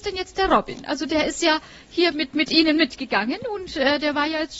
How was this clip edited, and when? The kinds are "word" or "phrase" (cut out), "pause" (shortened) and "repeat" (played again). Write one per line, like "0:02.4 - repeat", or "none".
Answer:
0:02.1 - word